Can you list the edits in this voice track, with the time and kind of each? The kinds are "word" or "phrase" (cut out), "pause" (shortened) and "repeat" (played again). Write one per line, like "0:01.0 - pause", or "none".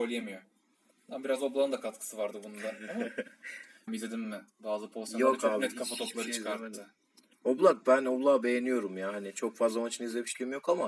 0:03.9 - word